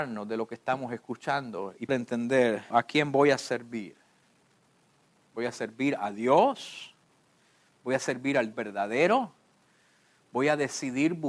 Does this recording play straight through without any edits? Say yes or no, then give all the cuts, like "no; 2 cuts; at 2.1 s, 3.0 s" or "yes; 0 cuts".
no; 3 cuts; at 1.9 s, 2.7 s, 8.5 s